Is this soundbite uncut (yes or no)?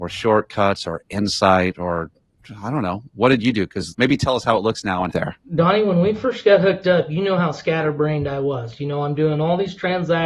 no